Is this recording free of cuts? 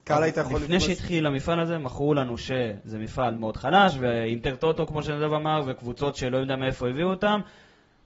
no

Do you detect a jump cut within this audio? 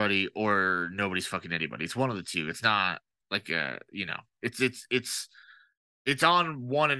no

